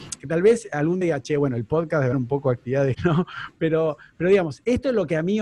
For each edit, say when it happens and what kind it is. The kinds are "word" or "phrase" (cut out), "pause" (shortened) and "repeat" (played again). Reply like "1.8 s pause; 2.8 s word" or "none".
1.0 s word; 2.1 s word; 2.9 s word